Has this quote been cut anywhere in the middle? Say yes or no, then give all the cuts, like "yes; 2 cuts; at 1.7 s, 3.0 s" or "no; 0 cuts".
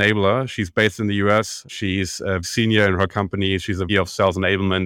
yes; 3 cuts; at 1.7 s, 2.4 s, 3.9 s